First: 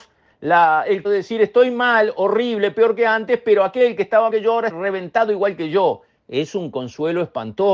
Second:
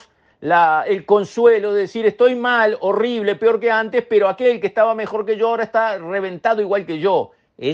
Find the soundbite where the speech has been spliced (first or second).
first